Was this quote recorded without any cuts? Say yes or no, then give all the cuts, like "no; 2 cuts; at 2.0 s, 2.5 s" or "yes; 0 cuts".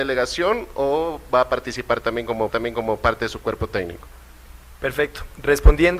no; 1 cut; at 2.5 s